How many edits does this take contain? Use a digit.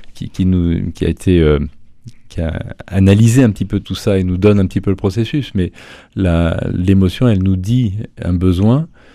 1